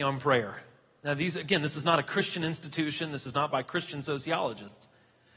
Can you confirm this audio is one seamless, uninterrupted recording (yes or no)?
yes